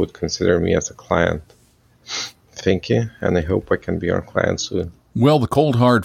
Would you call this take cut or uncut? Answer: uncut